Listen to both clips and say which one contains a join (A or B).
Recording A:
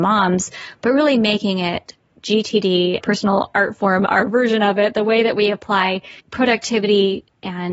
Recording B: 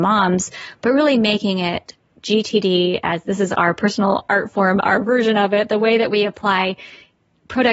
A